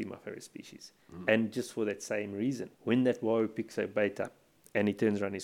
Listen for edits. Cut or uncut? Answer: cut